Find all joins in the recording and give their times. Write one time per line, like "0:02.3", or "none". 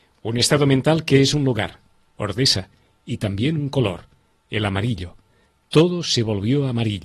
none